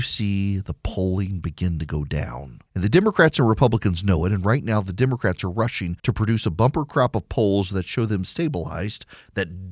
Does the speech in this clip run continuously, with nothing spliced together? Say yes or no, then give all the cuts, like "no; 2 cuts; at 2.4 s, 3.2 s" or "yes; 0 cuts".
no; 2 cuts; at 2.7 s, 6.0 s